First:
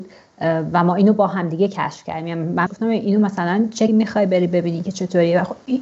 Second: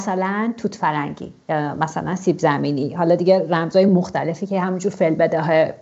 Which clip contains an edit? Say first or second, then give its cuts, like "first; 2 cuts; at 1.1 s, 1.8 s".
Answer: first; 2 cuts; at 2.7 s, 3.9 s